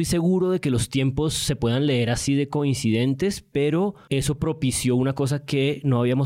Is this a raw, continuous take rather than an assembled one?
yes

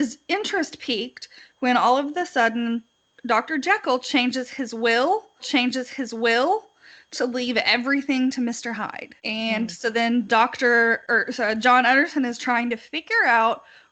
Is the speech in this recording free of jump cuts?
no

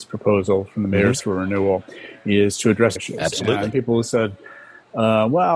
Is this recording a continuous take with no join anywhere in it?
no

